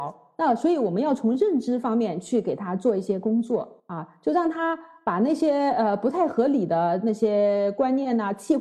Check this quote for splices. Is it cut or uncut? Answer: cut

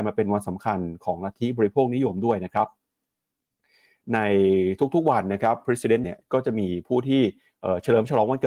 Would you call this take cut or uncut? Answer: cut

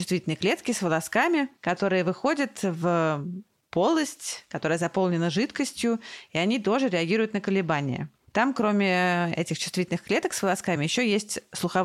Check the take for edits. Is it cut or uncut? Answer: uncut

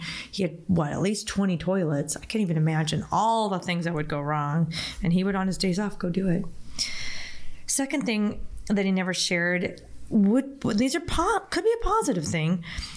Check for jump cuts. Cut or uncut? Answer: uncut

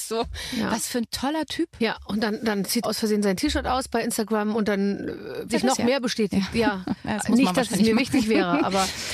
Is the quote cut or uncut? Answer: cut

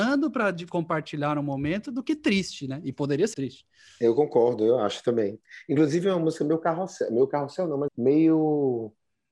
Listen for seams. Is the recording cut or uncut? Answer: cut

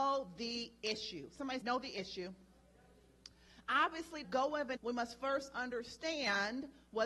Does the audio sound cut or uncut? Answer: cut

